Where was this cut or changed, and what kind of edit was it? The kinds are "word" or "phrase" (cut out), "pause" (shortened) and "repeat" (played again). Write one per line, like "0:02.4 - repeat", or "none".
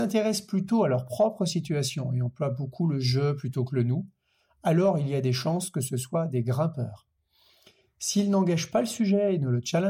none